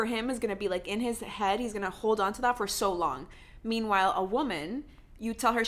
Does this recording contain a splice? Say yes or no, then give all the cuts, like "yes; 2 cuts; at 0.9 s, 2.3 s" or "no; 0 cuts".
no; 0 cuts